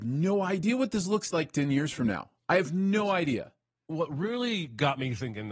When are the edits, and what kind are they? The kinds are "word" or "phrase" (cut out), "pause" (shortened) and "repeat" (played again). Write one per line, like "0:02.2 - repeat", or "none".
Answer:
none